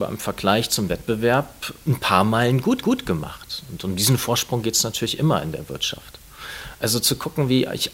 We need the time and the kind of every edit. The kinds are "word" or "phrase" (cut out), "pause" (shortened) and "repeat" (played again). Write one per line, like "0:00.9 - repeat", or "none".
0:02.8 - repeat